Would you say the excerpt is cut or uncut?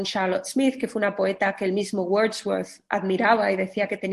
uncut